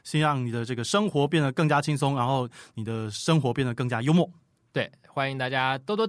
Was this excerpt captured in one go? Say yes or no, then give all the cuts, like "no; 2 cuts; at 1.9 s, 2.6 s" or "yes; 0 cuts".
yes; 0 cuts